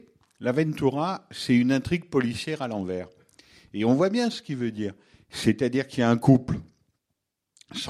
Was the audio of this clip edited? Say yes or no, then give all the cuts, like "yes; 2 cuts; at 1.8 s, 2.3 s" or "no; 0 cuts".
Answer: no; 0 cuts